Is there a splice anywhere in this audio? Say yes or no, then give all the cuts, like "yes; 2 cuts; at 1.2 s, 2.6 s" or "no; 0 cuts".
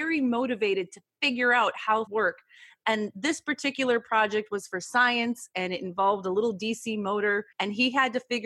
yes; 2 cuts; at 2.1 s, 7.5 s